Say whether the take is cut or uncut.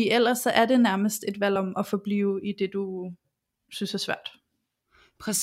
uncut